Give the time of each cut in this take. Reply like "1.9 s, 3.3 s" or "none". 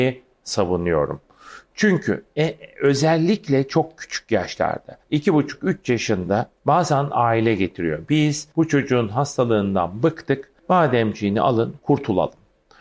5.0 s, 8.5 s, 10.6 s